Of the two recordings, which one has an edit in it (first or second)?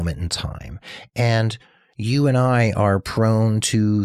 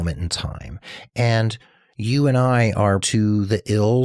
second